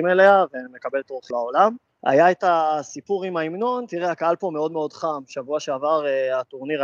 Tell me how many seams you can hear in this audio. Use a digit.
1